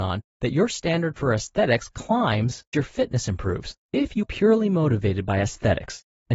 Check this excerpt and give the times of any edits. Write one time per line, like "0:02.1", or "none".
0:02.7
0:03.8
0:04.2